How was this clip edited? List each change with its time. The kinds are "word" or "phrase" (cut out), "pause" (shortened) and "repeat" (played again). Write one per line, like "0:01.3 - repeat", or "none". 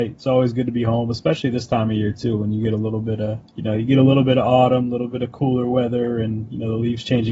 0:03.5 - pause